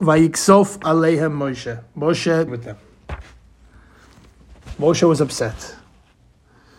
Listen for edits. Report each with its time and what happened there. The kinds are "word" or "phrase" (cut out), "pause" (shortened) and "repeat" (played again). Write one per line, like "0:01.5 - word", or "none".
0:02.5 - phrase